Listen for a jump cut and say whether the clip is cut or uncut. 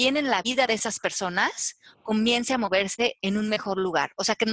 uncut